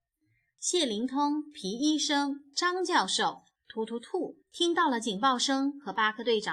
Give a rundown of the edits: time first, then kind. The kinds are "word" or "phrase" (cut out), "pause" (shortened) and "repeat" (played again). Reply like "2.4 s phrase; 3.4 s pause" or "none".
4.4 s pause